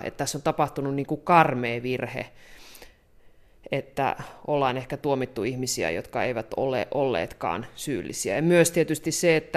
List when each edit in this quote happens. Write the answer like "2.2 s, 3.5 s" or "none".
none